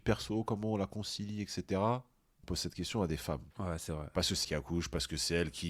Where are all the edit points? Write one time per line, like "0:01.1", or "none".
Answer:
0:02.4
0:03.5
0:04.4

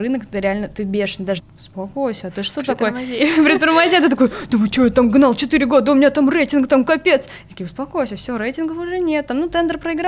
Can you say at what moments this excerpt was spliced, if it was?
0:01.4

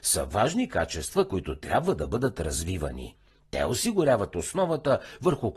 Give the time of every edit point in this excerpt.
none

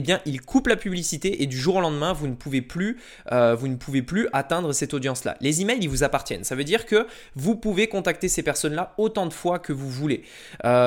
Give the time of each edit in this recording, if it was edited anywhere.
none

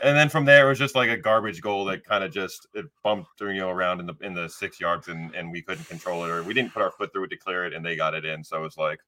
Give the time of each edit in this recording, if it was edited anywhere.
0:05.0

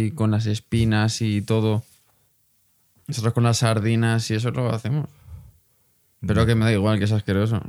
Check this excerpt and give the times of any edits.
none

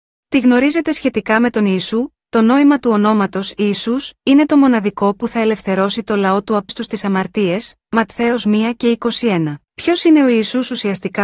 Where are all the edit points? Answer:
0:06.7
0:09.6

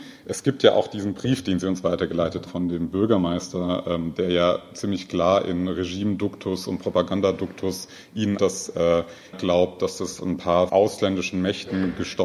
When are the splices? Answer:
0:02.5
0:08.4
0:09.3
0:10.7

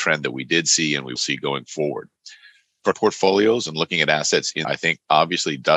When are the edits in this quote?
0:01.2
0:02.9
0:04.6

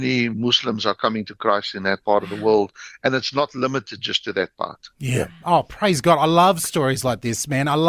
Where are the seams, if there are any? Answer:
none

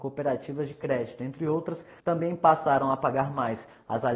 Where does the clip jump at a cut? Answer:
0:02.0

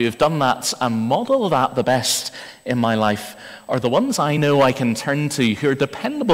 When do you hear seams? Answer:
none

